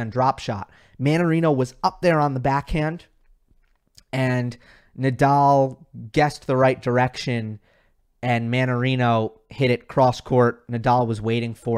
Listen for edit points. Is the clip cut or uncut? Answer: uncut